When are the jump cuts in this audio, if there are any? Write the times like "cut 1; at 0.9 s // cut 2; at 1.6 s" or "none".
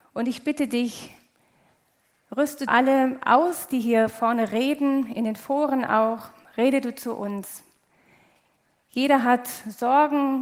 cut 1; at 2.7 s